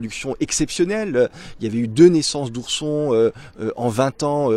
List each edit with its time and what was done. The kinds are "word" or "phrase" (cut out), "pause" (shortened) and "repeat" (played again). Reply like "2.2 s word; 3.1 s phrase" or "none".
none